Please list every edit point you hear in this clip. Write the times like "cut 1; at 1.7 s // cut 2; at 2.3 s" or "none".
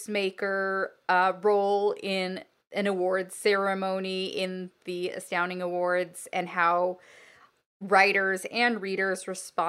none

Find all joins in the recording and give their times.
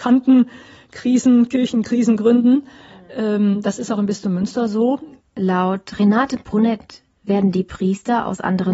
none

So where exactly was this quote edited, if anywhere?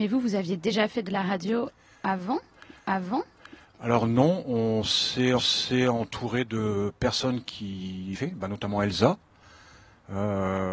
cut 1; at 2.8 s // cut 2; at 5.4 s // cut 3; at 8.1 s

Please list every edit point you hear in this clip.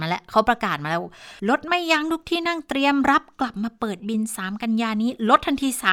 cut 1; at 1.4 s

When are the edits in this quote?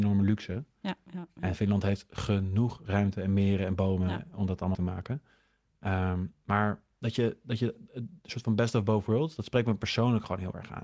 cut 1; at 4.7 s

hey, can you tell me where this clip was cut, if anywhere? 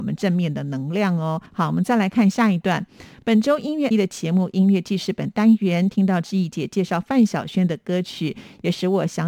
cut 1; at 1.5 s // cut 2; at 3.9 s

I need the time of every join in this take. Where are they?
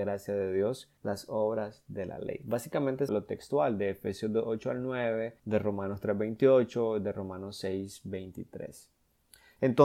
cut 1; at 1.0 s // cut 2; at 3.1 s // cut 3; at 5.4 s

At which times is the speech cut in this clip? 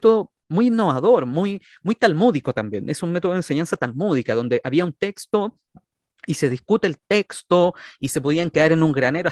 none

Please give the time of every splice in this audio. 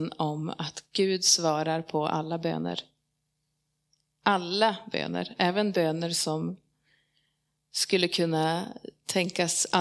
none

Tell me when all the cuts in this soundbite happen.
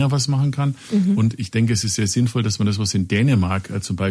none

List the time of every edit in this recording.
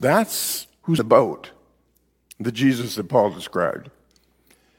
cut 1; at 1.0 s

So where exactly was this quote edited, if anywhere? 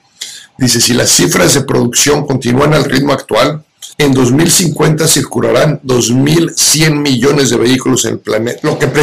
cut 1; at 3.9 s

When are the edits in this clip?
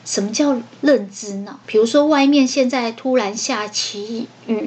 cut 1; at 1.6 s

